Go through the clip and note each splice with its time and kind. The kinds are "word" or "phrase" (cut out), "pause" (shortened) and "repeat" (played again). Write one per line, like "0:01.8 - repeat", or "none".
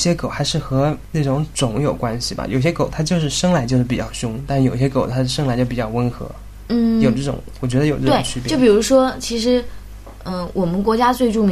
none